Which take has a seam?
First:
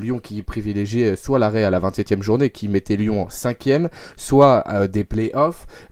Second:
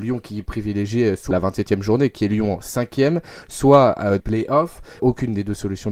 second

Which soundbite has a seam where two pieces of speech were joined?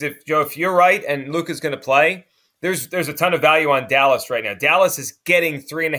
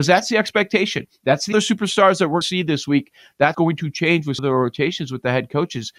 second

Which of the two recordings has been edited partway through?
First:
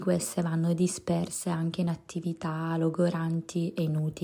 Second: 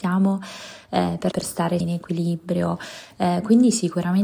second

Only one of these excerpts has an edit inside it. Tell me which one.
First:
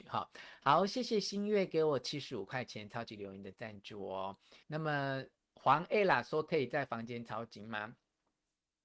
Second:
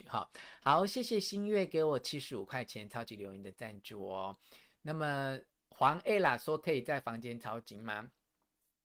first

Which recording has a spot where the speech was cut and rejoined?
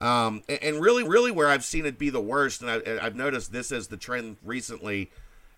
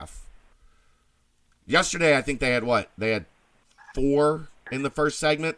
first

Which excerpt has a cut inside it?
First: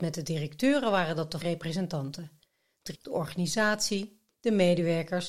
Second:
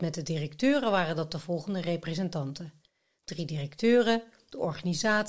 first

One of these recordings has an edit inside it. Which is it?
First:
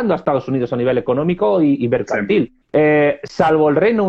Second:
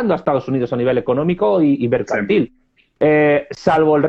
first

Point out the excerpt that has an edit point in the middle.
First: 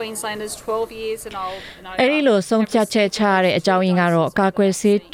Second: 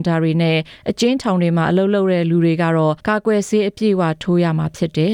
second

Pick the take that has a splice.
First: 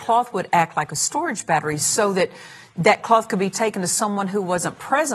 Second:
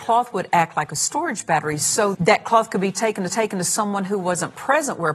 second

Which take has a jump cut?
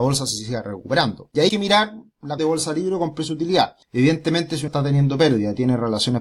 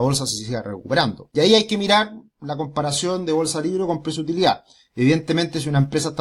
first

